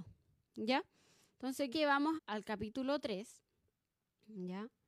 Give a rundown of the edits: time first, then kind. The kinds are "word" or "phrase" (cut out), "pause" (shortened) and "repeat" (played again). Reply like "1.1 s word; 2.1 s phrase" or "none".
1.7 s word; 2.2 s word